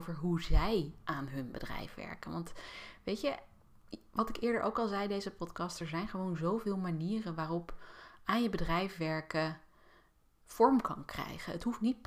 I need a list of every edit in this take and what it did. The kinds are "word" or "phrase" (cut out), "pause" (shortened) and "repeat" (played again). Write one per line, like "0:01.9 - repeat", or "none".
none